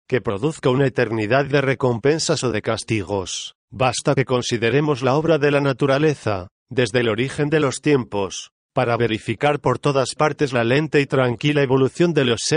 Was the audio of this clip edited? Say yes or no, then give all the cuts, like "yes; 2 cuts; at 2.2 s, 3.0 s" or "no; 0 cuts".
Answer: yes; 1 cut; at 3.6 s